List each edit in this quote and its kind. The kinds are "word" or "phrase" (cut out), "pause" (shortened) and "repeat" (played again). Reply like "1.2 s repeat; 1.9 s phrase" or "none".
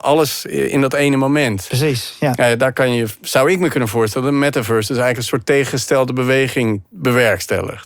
none